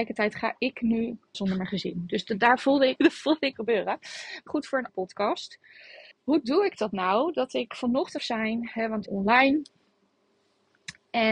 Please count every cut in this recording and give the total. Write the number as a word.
eight